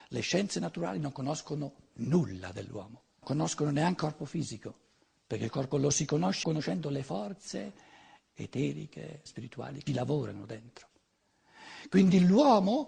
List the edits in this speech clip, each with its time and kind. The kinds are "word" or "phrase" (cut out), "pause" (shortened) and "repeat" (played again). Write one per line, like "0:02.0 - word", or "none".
0:03.2 - word
0:04.0 - word
0:05.7 - word
0:06.4 - word
0:09.3 - word
0:09.9 - word